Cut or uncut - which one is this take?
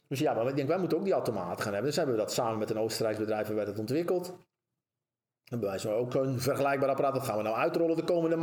uncut